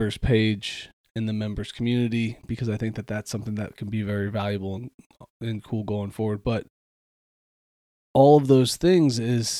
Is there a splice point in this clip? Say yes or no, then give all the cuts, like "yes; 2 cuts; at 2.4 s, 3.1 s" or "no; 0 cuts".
no; 0 cuts